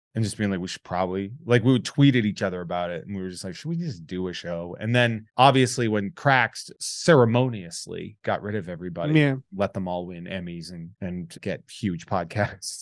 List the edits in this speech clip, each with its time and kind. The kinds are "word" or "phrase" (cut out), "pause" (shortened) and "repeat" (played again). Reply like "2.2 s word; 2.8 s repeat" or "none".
5.3 s pause; 6.7 s pause; 10.9 s pause

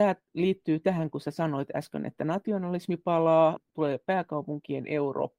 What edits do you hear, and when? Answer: none

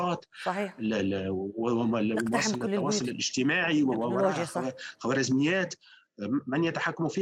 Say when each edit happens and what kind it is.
none

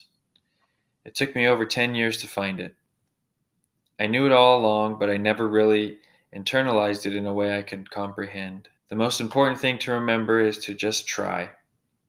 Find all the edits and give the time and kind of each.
8.8 s pause

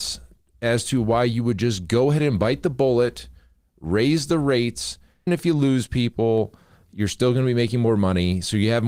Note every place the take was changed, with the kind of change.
5.3 s word

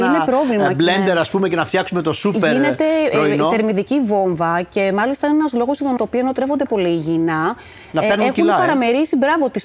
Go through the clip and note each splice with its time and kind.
6.0 s phrase; 6.7 s word

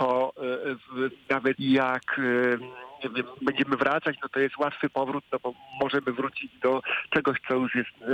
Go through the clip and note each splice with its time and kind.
1.1 s phrase; 1.5 s word

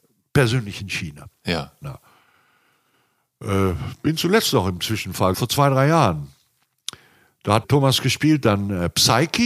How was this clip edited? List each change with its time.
5.3 s word; 7.6 s word

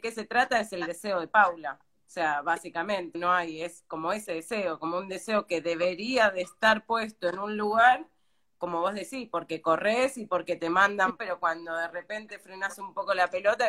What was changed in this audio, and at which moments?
3.1 s word; 11.2 s phrase

